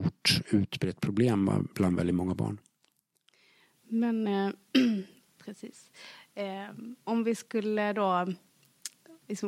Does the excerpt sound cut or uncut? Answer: cut